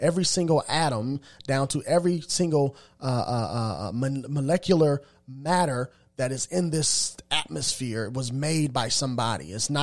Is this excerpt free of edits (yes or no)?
yes